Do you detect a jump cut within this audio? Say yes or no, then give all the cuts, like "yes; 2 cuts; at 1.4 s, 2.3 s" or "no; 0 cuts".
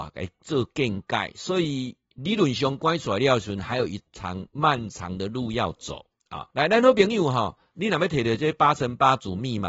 yes; 1 cut; at 6.5 s